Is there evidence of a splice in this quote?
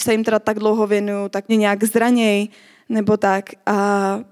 yes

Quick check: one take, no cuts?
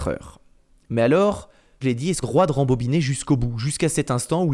no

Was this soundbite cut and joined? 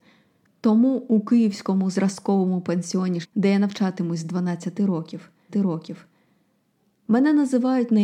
yes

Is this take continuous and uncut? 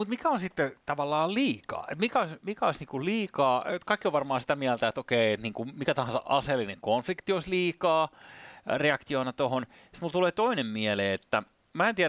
yes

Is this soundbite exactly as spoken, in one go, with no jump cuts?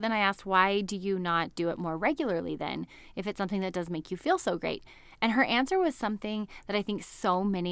yes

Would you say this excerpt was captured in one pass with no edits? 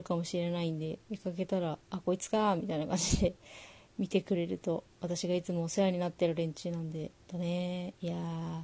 no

